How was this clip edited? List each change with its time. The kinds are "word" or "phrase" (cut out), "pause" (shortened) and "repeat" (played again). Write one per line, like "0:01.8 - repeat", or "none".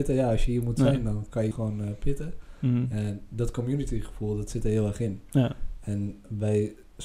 0:01.5 - word